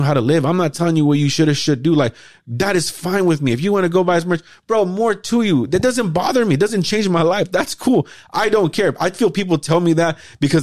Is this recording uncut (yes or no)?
yes